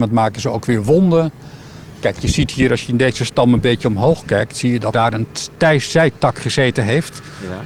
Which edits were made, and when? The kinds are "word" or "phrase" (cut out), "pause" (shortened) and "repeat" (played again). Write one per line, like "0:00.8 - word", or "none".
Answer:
0:04.9 - word

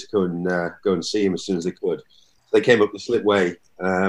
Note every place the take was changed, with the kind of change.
none

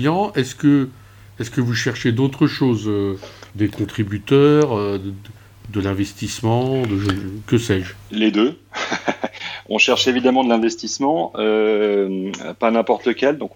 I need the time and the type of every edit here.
0:03.5 - pause

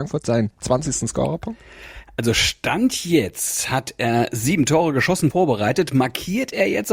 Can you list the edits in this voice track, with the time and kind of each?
0:05.3 - word

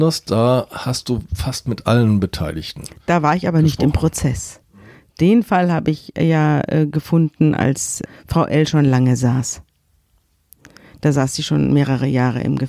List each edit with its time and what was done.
none

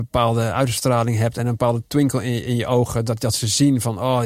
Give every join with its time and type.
none

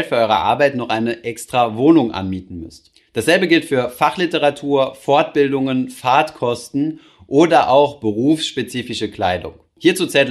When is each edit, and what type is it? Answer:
none

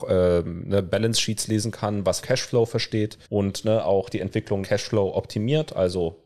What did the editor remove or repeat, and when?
0:02.2 - word
0:03.2 - pause
0:04.6 - word

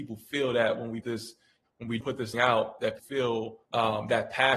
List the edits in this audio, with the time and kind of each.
0:01.0 - word
0:02.0 - word
0:02.3 - word
0:03.0 - word
0:03.6 - pause

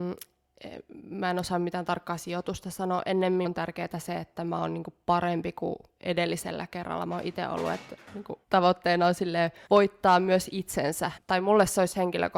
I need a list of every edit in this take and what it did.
0:03.4 - word
0:08.4 - pause
0:09.7 - pause
0:11.2 - phrase

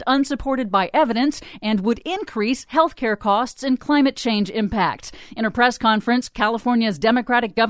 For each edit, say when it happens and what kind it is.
none

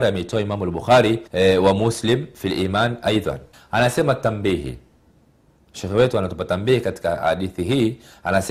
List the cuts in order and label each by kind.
0:01.3 - pause
0:03.5 - pause

